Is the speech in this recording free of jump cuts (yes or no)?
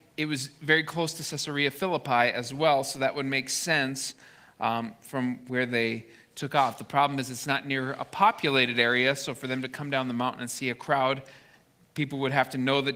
yes